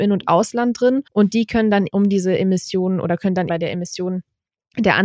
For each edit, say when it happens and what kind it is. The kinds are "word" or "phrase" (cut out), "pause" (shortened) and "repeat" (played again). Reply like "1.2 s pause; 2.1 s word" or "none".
1.1 s pause; 1.9 s word; 3.5 s word